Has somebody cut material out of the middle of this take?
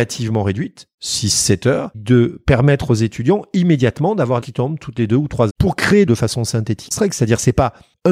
yes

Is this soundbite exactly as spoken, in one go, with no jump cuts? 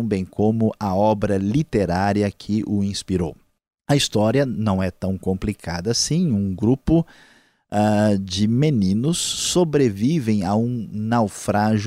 yes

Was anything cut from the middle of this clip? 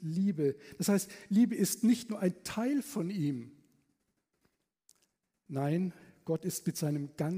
no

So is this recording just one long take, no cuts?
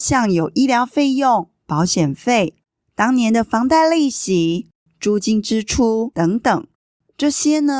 yes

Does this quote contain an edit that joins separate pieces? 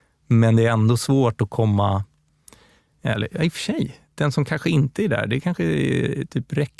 no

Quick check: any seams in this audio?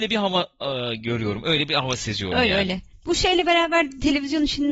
no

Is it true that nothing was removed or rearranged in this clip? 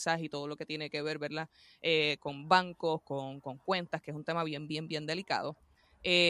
yes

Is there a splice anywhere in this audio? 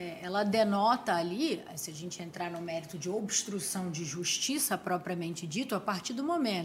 no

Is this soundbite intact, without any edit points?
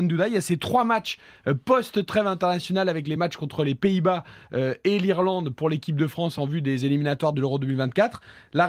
yes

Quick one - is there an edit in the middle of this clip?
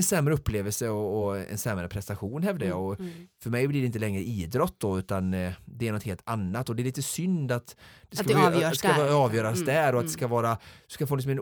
no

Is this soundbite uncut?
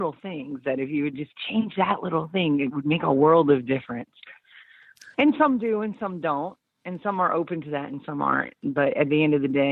no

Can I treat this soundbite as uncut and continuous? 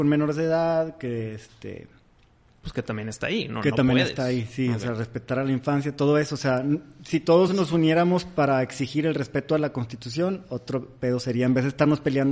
yes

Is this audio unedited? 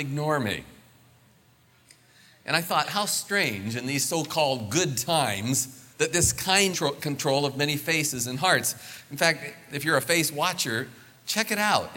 no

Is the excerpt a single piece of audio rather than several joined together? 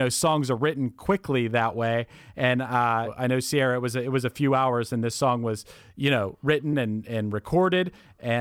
yes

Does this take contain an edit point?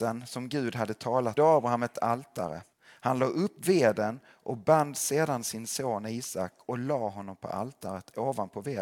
yes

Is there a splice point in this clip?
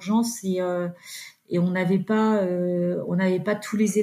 no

